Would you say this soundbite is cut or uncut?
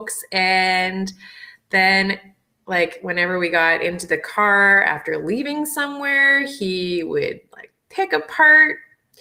uncut